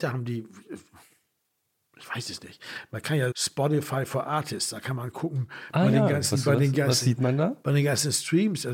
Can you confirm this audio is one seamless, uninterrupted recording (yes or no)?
no